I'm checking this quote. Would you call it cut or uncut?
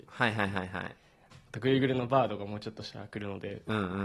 uncut